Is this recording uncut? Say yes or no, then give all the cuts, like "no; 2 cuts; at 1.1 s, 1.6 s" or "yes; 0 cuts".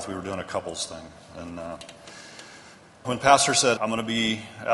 no; 2 cuts; at 3.0 s, 3.8 s